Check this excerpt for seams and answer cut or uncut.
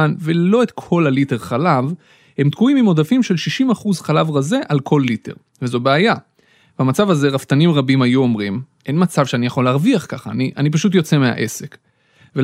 uncut